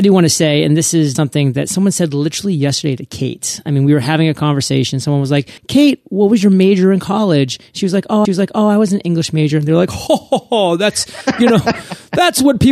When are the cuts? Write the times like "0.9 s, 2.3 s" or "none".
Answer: 1.1 s, 5.6 s, 8.2 s, 10.1 s